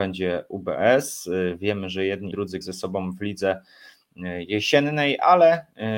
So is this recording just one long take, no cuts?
no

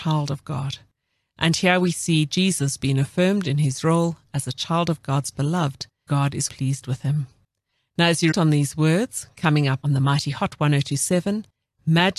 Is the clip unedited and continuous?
no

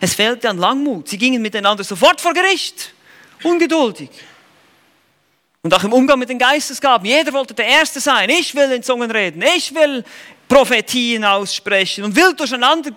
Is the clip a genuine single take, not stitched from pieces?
yes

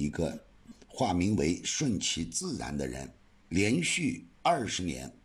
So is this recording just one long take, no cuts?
no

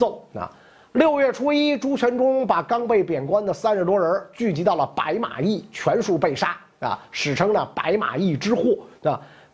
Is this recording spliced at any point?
no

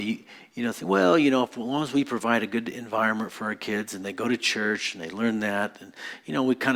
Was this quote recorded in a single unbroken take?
yes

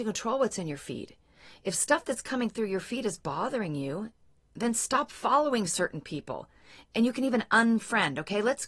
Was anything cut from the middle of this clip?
no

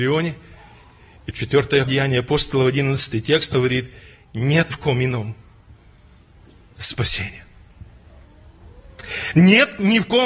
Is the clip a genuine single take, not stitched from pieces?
no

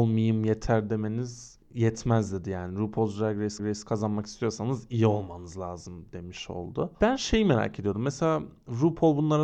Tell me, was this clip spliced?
yes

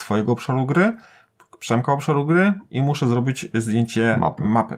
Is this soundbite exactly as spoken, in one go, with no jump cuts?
yes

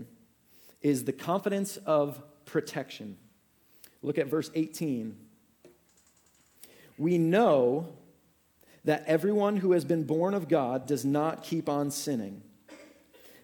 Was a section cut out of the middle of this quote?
no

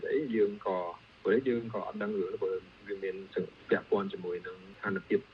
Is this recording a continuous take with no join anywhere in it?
yes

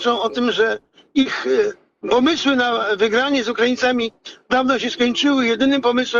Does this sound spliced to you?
no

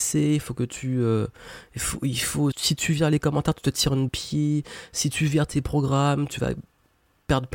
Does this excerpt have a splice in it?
yes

